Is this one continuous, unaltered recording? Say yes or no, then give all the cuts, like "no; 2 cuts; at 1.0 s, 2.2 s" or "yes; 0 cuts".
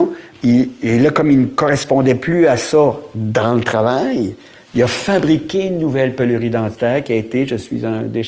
yes; 0 cuts